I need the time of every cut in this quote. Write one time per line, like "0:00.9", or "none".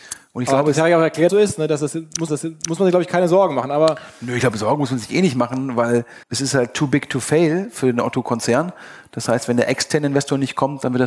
0:01.3
0:02.3
0:06.2

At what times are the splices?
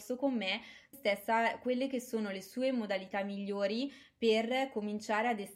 0:00.9

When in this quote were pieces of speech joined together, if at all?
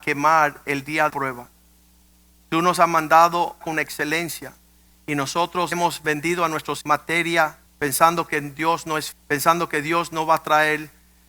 0:01.1
0:03.6
0:05.7
0:06.8
0:07.7
0:09.1

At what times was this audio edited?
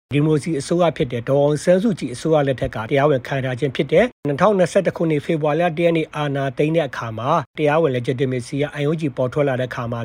none

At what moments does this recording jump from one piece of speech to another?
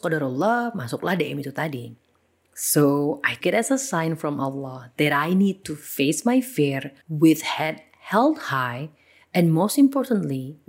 0:03.4
0:07.0

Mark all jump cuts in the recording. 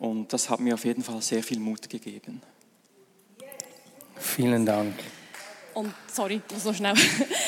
none

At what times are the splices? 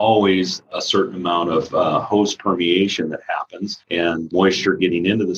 0:03.8

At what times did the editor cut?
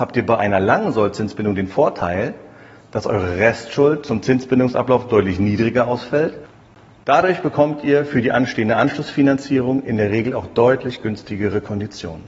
none

